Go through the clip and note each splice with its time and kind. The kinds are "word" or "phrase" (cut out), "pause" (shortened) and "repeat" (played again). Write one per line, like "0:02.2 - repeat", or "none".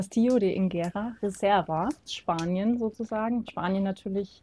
0:02.1 - word
0:03.5 - word